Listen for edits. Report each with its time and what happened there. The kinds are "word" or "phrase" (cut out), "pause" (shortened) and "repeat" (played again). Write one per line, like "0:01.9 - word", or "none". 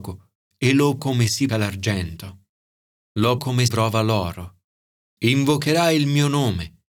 0:01.0 - word
0:01.5 - word
0:03.4 - word
0:03.7 - word